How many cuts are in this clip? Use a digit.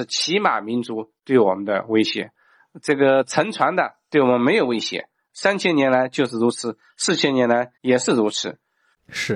1